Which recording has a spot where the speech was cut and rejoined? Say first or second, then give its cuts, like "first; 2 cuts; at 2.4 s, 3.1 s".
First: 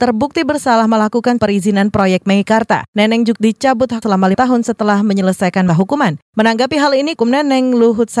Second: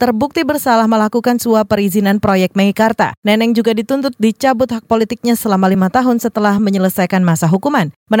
first; 6 cuts; at 1.4 s, 3.4 s, 4.0 s, 4.3 s, 5.7 s, 7.2 s